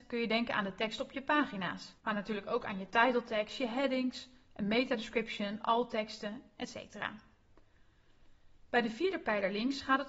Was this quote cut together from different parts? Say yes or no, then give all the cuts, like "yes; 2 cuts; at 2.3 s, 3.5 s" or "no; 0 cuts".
yes; 1 cut; at 2.0 s